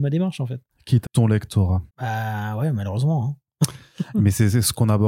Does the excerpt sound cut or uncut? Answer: cut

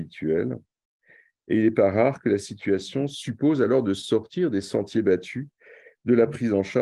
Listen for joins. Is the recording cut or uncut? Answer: uncut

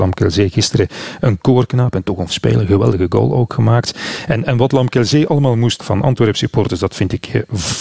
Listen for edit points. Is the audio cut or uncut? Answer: cut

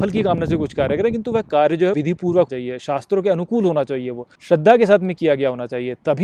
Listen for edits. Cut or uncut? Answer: cut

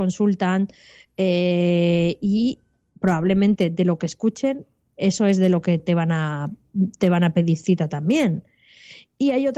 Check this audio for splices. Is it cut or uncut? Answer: uncut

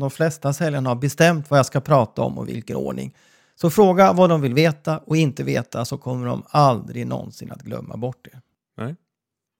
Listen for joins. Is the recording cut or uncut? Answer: uncut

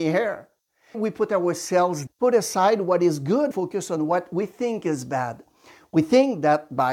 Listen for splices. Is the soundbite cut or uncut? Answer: cut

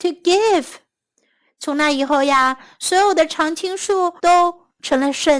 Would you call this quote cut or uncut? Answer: cut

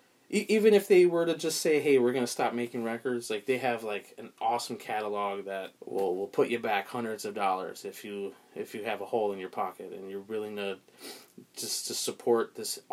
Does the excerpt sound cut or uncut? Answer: cut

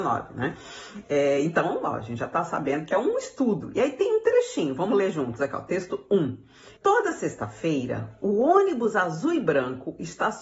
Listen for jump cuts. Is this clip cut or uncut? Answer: cut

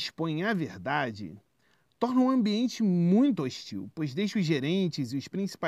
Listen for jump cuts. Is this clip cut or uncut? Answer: uncut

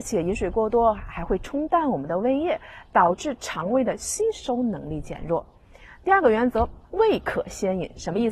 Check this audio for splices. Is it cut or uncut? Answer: cut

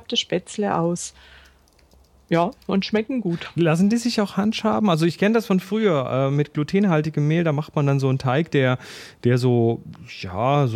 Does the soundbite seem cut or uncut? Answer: uncut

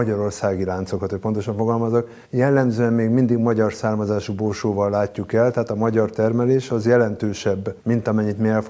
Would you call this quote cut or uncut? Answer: cut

